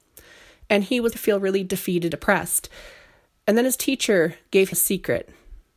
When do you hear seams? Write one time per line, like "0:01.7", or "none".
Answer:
0:01.1
0:02.1
0:04.7

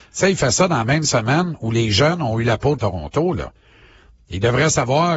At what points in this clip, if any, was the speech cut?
0:02.8

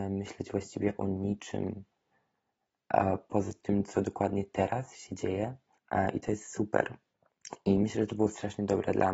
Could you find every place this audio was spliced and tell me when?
0:05.8

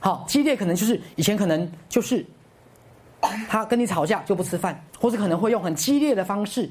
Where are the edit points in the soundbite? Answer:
0:01.1
0:04.9

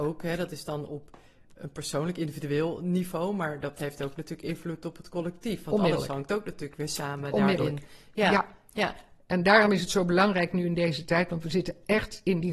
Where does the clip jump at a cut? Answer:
none

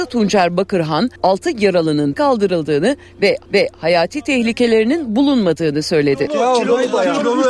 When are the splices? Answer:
0:01.2
0:02.1
0:03.5

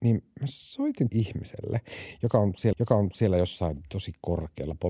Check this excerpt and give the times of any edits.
0:01.1
0:02.7

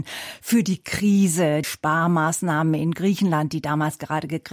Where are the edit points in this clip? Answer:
0:01.6

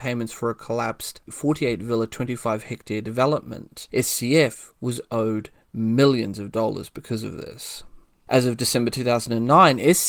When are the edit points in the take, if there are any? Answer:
none

